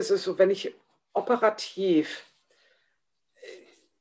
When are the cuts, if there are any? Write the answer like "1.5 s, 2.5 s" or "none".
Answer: none